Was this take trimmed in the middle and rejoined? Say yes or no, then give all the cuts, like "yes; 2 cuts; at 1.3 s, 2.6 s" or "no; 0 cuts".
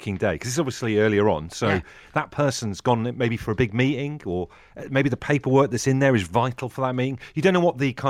no; 0 cuts